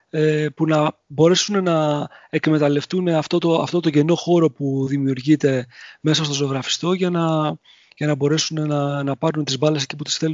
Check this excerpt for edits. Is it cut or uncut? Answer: uncut